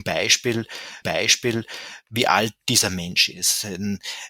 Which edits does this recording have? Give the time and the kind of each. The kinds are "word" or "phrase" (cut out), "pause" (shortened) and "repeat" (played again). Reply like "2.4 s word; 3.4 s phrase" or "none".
1.0 s repeat